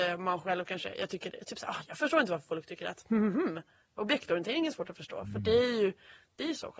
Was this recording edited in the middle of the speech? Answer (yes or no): no